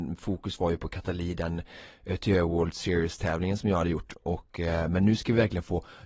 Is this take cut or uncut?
uncut